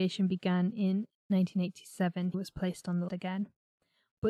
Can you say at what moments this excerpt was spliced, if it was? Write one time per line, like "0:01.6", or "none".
0:02.3
0:03.1